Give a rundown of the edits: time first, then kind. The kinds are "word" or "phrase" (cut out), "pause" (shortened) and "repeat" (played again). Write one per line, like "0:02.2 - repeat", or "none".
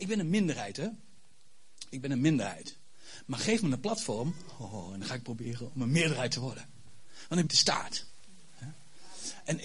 0:07.5 - phrase